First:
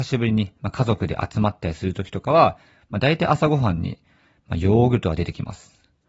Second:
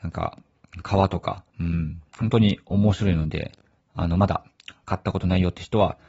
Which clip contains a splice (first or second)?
second